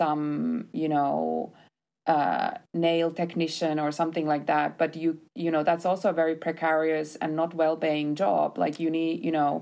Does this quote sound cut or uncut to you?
uncut